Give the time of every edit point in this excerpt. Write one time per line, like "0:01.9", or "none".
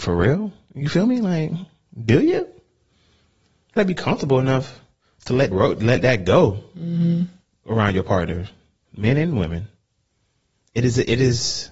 0:03.8
0:05.5